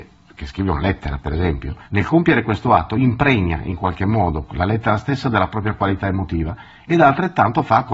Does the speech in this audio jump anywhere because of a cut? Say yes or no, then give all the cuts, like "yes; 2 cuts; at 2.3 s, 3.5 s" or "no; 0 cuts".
yes; 1 cut; at 1.8 s